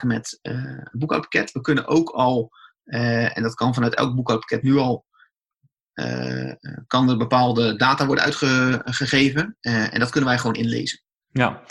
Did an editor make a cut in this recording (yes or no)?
no